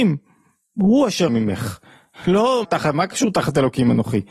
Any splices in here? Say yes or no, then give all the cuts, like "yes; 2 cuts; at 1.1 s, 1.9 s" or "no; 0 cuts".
yes; 2 cuts; at 1.3 s, 2.6 s